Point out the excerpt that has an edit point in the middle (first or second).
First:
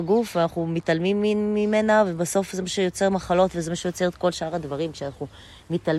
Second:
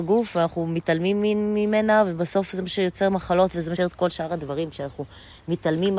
second